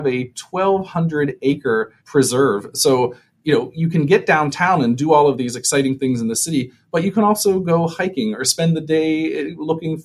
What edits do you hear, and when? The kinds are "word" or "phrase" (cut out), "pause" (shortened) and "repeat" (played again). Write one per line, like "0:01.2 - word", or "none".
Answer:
0:02.0 - pause